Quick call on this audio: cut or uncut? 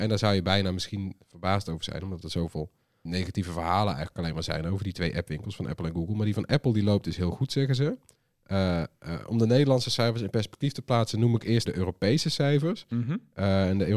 cut